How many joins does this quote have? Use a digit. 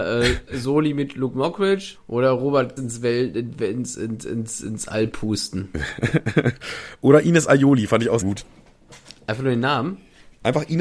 2